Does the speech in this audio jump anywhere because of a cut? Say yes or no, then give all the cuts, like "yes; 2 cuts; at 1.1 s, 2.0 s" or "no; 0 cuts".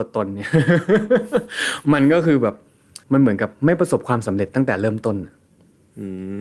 yes; 1 cut; at 3.0 s